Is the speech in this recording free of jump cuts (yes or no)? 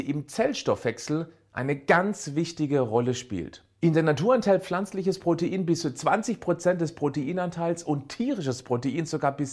yes